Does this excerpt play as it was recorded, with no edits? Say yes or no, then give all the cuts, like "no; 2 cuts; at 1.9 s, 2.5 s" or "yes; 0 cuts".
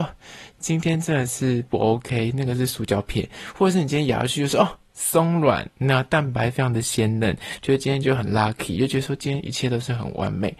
yes; 0 cuts